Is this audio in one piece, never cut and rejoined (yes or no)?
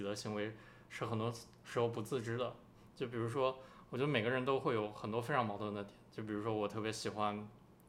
yes